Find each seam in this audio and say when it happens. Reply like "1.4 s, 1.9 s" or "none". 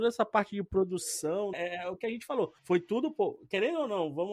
1.5 s, 2.6 s

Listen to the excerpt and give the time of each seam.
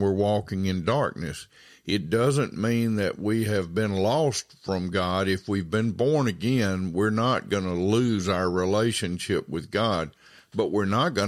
none

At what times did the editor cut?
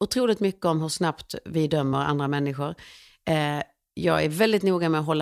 none

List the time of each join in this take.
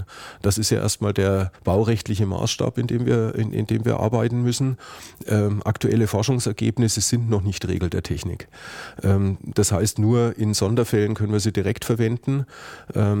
1.5 s

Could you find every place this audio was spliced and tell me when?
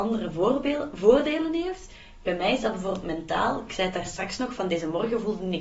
none

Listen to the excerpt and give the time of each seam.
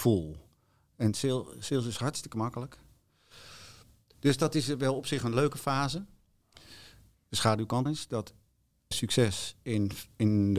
7.9 s, 8.9 s

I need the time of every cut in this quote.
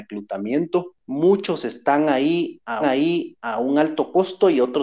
2.8 s

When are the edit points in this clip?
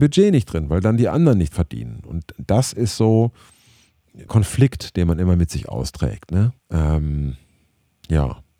1.5 s, 4.3 s, 6.6 s

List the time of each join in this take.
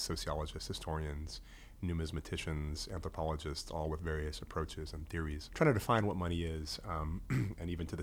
5.5 s

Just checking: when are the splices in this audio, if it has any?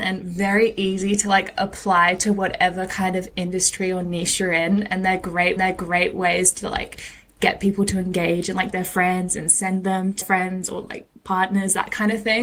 5.6 s, 8.7 s, 10.2 s

